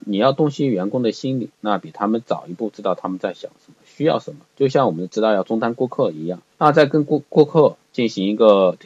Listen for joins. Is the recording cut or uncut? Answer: cut